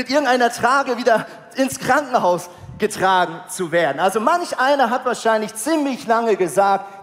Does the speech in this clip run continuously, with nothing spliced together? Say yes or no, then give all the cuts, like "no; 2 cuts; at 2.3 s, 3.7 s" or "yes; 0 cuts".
yes; 0 cuts